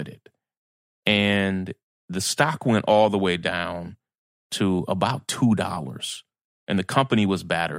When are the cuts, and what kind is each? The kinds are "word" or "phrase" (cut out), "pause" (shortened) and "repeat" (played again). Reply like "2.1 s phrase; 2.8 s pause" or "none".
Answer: none